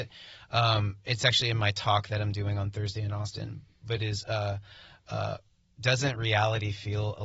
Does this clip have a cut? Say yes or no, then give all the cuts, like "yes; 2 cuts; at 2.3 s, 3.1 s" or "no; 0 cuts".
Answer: no; 0 cuts